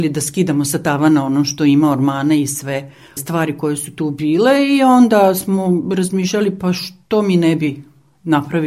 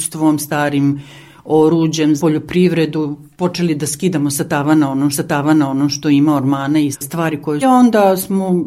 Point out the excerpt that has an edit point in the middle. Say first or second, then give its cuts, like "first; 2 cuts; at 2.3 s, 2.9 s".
second; 5 cuts; at 2.2 s, 3.3 s, 5.1 s, 6.9 s, 7.6 s